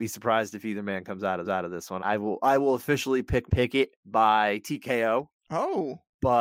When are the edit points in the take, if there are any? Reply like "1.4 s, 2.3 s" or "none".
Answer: 1.4 s, 2.0 s, 3.5 s, 4.0 s